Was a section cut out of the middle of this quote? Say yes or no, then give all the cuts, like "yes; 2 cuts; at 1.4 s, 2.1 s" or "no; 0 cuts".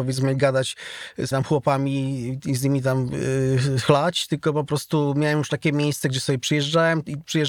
yes; 1 cut; at 1.3 s